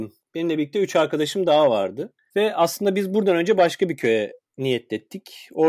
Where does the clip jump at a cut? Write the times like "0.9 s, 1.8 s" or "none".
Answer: 4.4 s

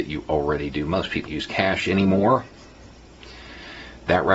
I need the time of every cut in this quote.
1.2 s

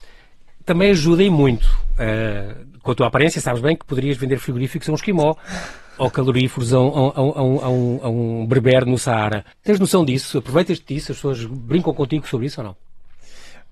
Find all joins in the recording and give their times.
9.5 s

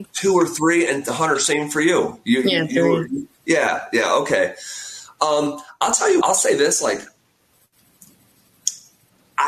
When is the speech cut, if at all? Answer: 3.3 s, 6.2 s

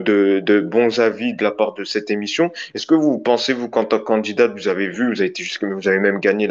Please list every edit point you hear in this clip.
none

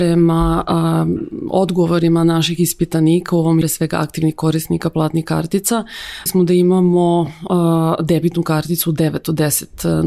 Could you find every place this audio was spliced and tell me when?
3.6 s, 6.3 s

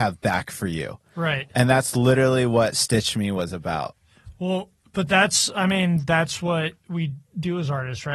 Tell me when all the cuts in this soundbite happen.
none

